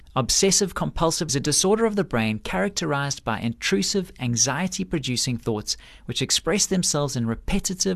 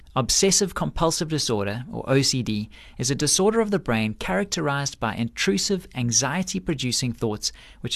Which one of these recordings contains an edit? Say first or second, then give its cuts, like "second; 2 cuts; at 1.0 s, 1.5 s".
first; 1 cut; at 1.3 s